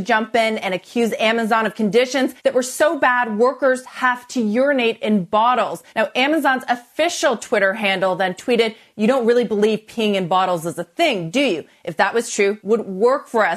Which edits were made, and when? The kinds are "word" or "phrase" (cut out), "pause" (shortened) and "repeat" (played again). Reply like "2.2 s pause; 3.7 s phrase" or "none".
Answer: 2.4 s pause; 5.9 s pause; 12.6 s word